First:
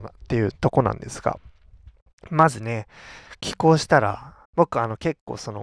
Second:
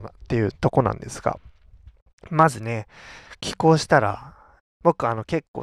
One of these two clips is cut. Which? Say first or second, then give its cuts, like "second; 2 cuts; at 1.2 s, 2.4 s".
first; 1 cut; at 4.4 s